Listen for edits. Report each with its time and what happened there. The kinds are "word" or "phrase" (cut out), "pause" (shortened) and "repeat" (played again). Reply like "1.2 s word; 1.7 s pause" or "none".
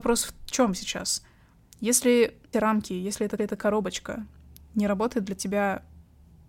2.5 s word; 3.4 s repeat